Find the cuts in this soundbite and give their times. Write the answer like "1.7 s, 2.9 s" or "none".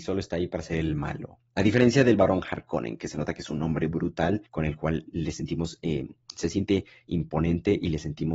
4.5 s